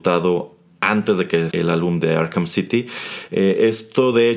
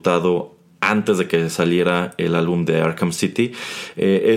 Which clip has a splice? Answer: first; 1 cut; at 1.5 s

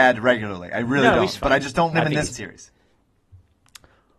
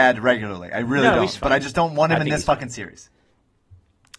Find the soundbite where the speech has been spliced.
first; 2 cuts; at 1.9 s, 2.3 s

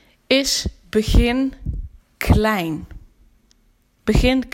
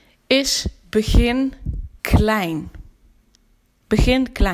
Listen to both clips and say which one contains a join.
second; 1 cut; at 2.0 s

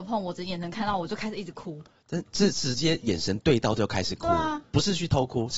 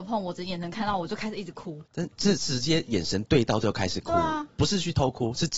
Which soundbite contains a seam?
second; 1 cut; at 1.8 s

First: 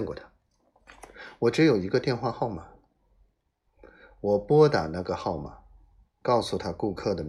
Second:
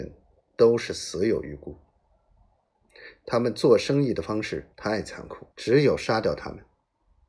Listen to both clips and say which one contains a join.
second; 2 cuts; at 4.7 s, 5.5 s

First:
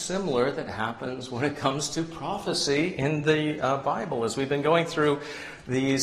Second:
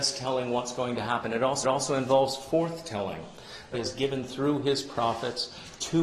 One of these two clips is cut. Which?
second; 2 cuts; at 1.6 s, 3.7 s

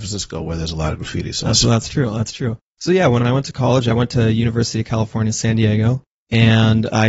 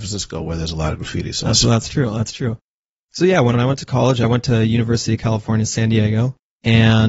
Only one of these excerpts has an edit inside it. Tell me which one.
first; 1 cut; at 2.6 s

